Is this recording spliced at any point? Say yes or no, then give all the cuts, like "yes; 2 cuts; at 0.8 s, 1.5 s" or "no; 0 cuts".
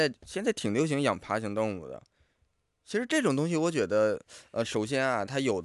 no; 0 cuts